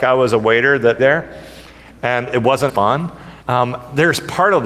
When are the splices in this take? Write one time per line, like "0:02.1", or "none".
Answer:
0:01.0
0:02.7
0:03.4